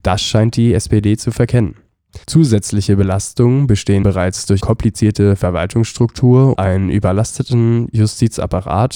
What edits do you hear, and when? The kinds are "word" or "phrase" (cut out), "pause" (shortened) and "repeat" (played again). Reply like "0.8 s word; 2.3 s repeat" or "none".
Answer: 2.2 s pause; 4.0 s phrase; 4.6 s word; 6.6 s word